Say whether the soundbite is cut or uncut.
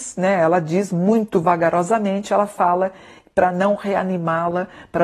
uncut